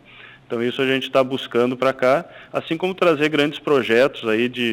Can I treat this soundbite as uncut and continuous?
yes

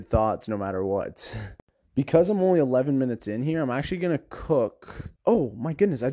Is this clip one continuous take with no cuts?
no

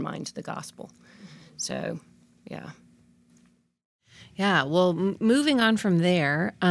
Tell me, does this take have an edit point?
no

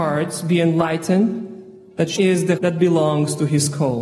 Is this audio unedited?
no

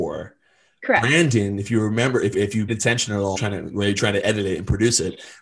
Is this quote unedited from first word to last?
no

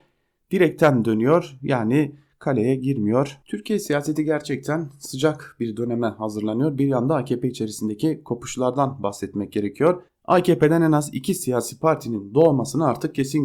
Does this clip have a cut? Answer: yes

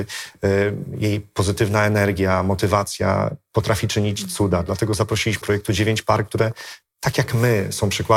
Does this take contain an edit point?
yes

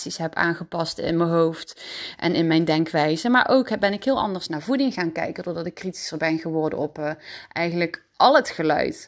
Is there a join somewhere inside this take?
no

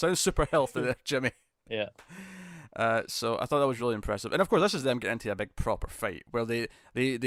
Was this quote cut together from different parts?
no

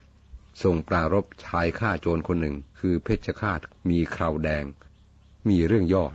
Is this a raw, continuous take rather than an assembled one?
no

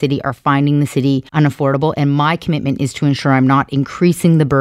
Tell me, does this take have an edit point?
yes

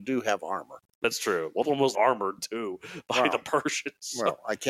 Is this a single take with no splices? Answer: no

